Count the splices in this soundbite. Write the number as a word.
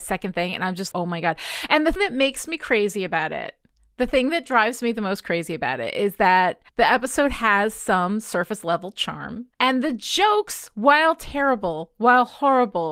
four